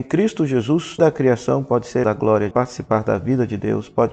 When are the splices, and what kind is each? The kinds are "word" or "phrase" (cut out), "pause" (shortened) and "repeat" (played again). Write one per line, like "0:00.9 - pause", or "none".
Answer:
0:01.0 - word
0:02.0 - word
0:02.5 - phrase